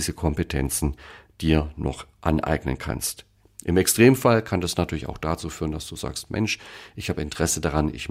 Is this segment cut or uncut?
uncut